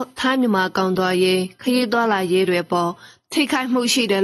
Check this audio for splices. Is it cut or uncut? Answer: uncut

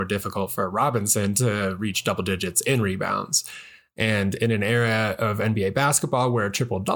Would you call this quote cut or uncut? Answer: uncut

